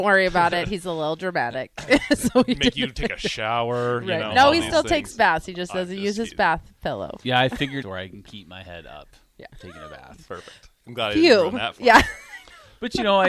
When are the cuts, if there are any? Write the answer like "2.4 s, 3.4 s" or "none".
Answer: 7.8 s, 9.5 s